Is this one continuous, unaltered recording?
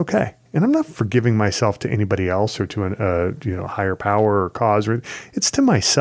yes; 0 cuts

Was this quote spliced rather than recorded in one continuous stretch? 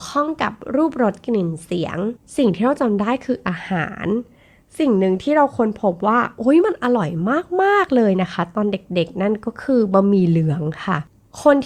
no; 0 cuts

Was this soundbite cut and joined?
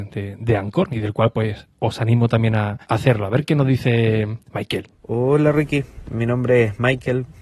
yes; 2 cuts; at 2.8 s, 4.9 s

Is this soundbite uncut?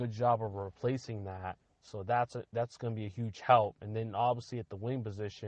no; 1 cut; at 1.6 s

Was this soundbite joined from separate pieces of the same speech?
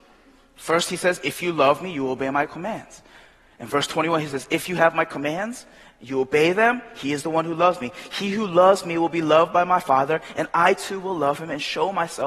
no; 0 cuts

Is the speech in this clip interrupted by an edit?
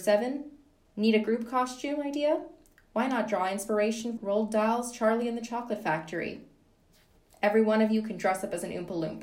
yes; 1 cut; at 4.2 s

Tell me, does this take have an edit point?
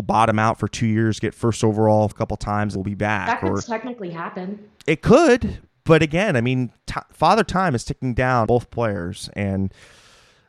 yes; 5 cuts; at 2.1 s, 2.8 s, 3.6 s, 4.8 s, 8.5 s

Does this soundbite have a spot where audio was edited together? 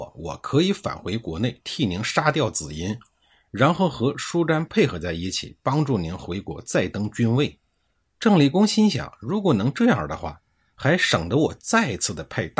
no; 0 cuts

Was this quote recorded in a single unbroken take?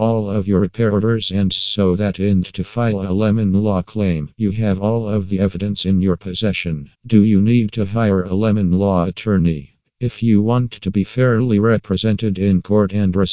no; 3 cuts; at 1.5 s, 2.4 s, 6.9 s

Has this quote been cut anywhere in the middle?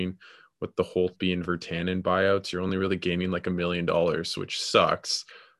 no; 0 cuts

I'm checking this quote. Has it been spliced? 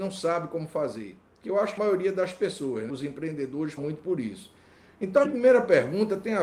yes; 4 cuts; at 1.8 s, 2.9 s, 3.8 s, 5.2 s

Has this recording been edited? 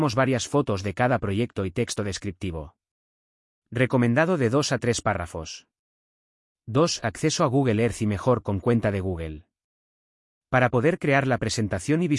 no; 0 cuts

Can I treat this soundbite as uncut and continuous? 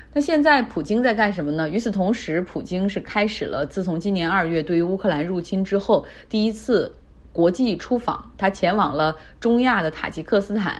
yes; 0 cuts

